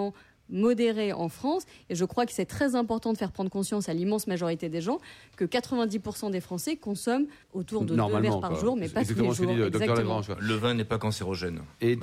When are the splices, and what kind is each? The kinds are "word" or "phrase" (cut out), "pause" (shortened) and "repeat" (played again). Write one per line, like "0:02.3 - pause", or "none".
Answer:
0:07.4 - pause